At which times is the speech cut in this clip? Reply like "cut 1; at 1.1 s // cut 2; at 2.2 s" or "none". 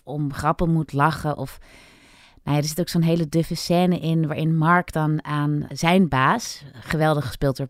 none